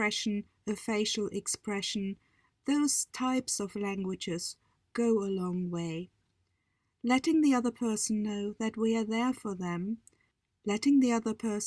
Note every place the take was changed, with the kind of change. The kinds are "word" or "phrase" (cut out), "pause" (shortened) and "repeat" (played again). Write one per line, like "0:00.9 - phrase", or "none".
none